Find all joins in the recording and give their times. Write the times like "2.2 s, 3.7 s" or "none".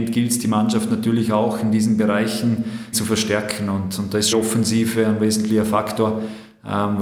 2.9 s, 4.3 s